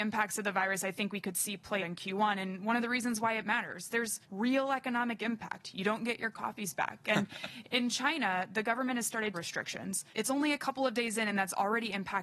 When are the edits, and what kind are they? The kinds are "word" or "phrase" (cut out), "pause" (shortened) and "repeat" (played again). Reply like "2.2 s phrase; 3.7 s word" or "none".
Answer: 1.8 s word; 4.2 s pause; 9.3 s phrase; 10.1 s pause